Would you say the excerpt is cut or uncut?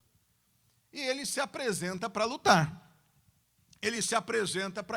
uncut